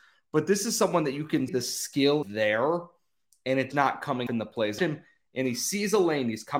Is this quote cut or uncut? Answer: cut